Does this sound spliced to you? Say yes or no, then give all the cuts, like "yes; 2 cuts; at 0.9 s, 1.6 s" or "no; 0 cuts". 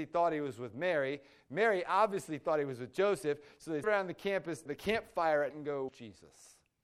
yes; 4 cuts; at 3.8 s, 4.7 s, 5.5 s, 5.9 s